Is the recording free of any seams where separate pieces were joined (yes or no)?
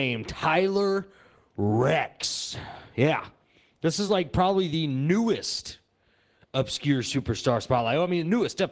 yes